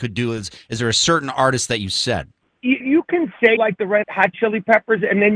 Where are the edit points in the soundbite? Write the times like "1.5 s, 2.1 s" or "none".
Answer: 2.8 s, 3.6 s, 4.0 s